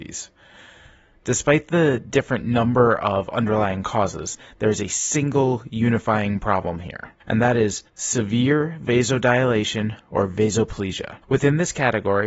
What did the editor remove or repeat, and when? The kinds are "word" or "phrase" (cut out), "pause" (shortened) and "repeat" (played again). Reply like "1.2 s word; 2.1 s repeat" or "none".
7.2 s pause; 7.9 s pause; 11.2 s pause